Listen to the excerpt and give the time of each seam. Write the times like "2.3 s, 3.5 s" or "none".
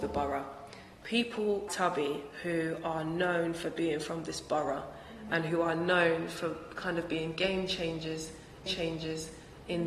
1.7 s, 8.7 s